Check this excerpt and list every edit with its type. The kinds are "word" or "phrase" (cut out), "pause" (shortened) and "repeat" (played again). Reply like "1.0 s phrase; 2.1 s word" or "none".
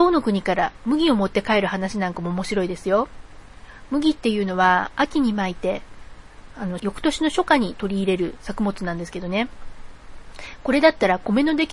6.8 s phrase